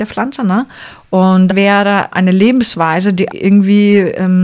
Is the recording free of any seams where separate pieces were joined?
no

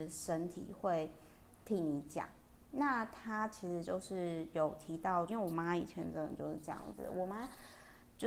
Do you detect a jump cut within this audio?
yes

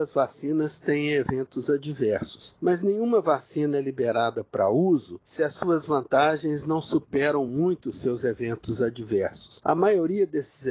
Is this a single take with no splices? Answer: yes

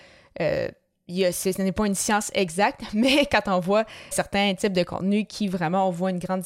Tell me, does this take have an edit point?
yes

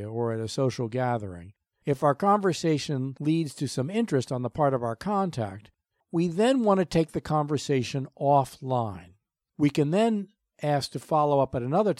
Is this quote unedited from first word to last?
yes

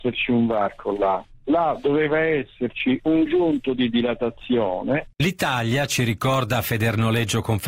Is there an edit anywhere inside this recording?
yes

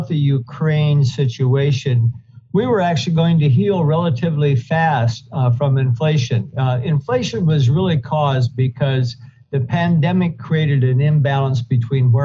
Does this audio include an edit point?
no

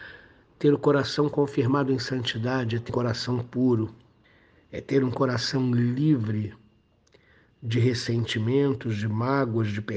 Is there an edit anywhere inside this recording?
yes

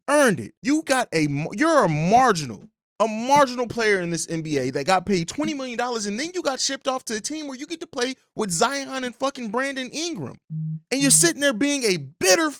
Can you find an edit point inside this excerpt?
no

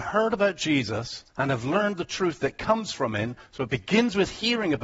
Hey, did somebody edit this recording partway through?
yes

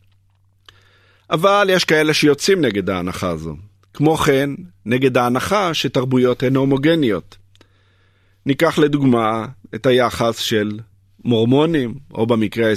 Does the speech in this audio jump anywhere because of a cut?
no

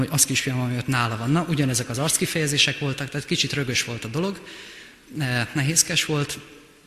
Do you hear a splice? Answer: no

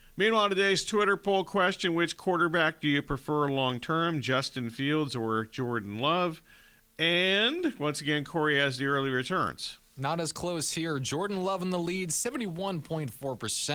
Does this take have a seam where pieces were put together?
no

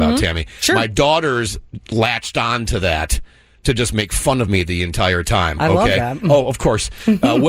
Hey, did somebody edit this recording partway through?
no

